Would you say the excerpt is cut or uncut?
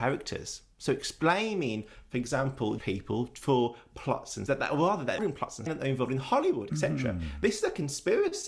cut